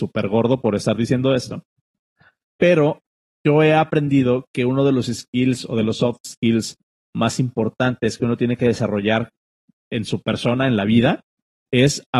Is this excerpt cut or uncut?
uncut